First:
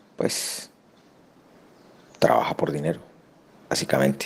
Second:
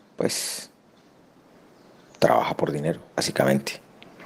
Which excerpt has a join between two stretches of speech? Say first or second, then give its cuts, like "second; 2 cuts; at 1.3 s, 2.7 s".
second; 1 cut; at 3.1 s